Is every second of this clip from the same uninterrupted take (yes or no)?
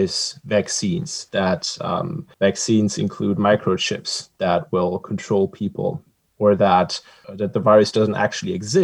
yes